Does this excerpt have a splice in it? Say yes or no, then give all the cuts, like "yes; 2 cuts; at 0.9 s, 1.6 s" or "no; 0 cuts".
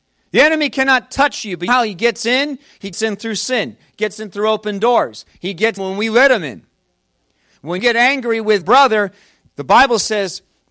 yes; 5 cuts; at 1.7 s, 2.9 s, 5.8 s, 7.8 s, 8.6 s